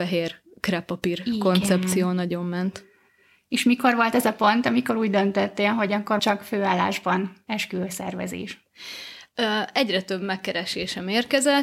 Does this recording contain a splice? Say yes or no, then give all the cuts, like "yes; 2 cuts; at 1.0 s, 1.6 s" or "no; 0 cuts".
yes; 1 cut; at 6.2 s